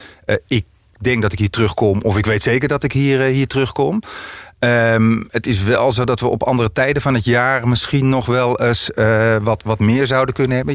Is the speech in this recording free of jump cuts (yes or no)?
yes